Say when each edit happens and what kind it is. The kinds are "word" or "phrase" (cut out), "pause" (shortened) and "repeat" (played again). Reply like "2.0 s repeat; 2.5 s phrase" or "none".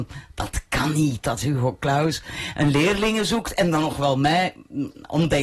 none